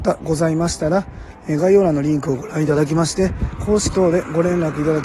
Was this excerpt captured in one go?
no; 1 cut; at 3.9 s

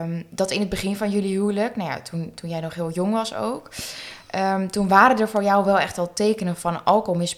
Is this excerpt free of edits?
yes; 0 cuts

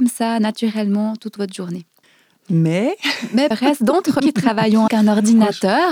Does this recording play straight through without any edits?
no; 5 cuts; at 1.4 s, 2.0 s, 3.5 s, 4.2 s, 4.9 s

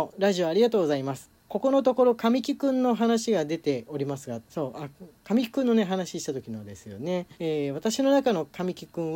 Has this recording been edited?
yes; 3 cuts; at 1.4 s, 4.5 s, 7.3 s

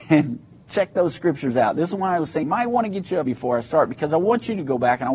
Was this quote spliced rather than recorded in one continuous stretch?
yes; 2 cuts; at 2.4 s, 3.3 s

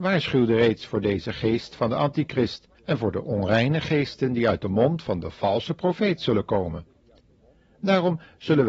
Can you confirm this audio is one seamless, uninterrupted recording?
no; 1 cut; at 2.7 s

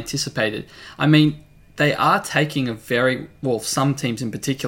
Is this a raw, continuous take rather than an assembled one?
yes; 0 cuts

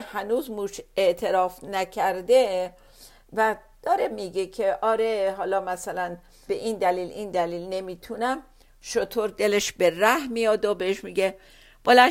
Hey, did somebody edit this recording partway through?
yes; 2 cuts; at 4.1 s, 6.5 s

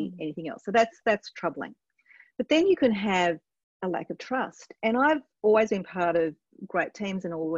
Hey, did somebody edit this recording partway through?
no; 0 cuts

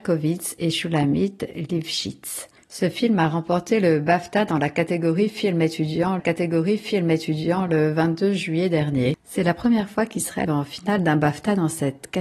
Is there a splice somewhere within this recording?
yes; 2 cuts; at 6.2 s, 10.5 s

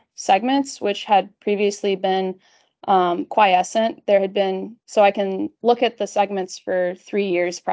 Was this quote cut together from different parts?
yes; 1 cut; at 4.8 s

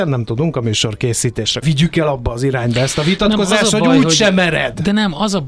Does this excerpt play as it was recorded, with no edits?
no; 1 cut; at 1.6 s

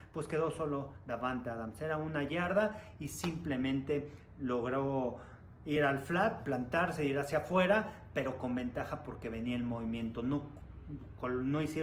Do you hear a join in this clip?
no; 0 cuts

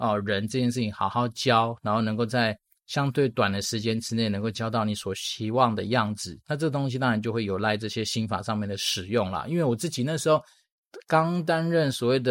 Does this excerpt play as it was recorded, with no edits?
yes; 0 cuts

